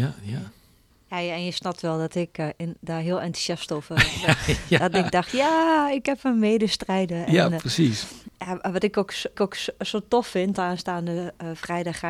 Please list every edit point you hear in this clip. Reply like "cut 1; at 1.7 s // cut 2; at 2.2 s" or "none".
cut 1; at 8.3 s // cut 2; at 9.3 s // cut 3; at 10.6 s